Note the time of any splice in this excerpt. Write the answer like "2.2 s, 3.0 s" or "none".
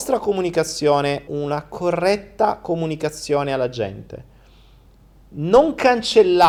1.3 s